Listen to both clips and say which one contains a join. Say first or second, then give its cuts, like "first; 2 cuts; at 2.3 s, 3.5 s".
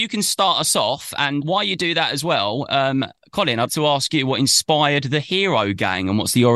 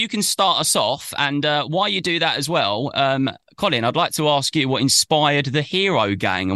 first; 2 cuts; at 1.4 s, 3.7 s